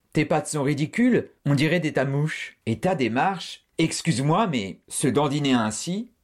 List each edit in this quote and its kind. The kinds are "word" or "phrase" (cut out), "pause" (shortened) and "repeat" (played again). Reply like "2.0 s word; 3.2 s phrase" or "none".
1.4 s pause; 1.9 s word; 2.6 s pause; 3.7 s pause; 4.8 s pause